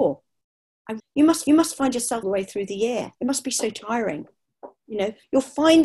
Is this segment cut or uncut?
cut